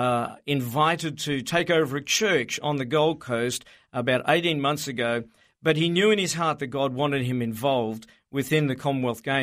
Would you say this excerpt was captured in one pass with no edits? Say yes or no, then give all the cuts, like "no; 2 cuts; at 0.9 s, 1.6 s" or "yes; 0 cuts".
yes; 0 cuts